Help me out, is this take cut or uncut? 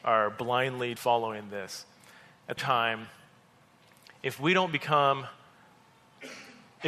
cut